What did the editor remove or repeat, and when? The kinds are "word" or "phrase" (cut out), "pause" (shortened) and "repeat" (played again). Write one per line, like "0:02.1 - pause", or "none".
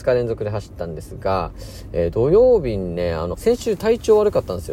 0:03.3 - phrase